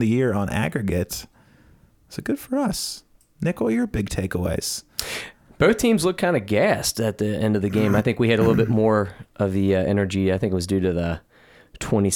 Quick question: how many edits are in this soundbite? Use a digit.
0